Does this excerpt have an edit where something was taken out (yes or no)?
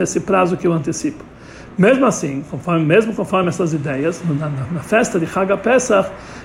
no